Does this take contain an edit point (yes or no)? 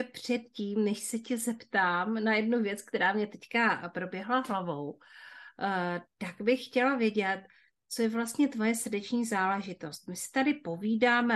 no